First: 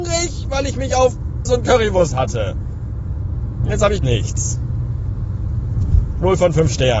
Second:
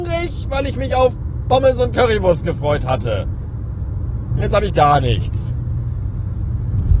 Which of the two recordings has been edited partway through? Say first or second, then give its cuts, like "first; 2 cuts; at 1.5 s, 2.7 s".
first; 3 cuts; at 1.4 s, 2.1 s, 4.0 s